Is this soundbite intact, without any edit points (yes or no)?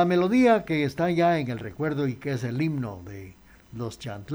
yes